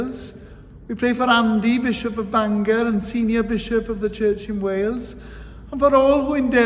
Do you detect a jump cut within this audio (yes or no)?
no